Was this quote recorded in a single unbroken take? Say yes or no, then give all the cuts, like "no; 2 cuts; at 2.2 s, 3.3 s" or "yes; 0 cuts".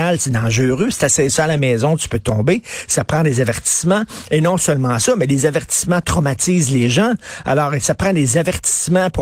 yes; 0 cuts